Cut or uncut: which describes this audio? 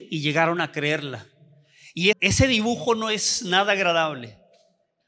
cut